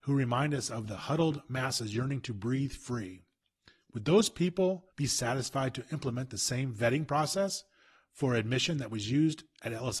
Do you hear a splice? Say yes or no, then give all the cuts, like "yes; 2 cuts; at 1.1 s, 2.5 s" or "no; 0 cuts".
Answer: yes; 1 cut; at 4.9 s